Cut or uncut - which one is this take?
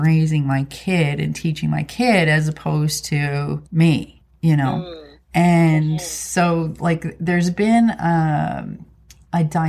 cut